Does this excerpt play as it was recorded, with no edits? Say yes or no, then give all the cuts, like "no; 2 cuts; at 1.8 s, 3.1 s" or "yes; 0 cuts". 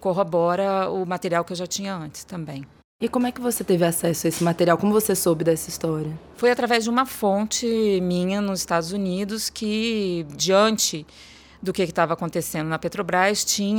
yes; 0 cuts